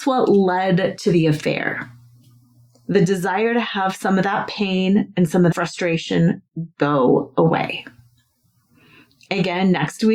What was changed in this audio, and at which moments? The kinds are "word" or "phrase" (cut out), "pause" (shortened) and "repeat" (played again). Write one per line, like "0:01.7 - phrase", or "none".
0:05.5 - word